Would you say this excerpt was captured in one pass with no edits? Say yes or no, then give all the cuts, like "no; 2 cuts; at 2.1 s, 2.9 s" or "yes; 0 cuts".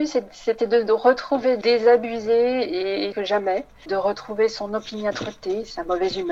no; 2 cuts; at 1.6 s, 3.1 s